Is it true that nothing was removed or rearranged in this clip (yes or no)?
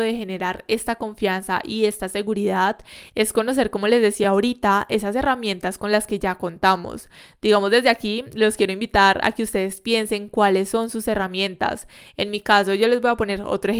yes